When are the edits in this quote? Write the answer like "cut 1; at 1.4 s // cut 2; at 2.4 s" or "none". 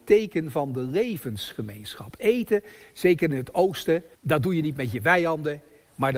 cut 1; at 4.1 s